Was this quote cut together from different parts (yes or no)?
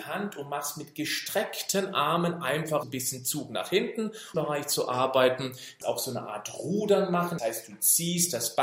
yes